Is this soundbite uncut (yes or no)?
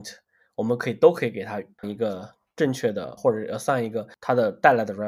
no